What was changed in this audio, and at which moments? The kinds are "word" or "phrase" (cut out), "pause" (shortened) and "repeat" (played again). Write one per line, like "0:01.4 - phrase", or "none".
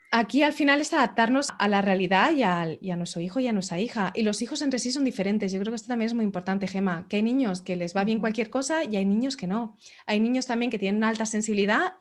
0:01.5 - word